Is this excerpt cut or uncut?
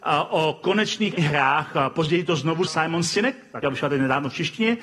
cut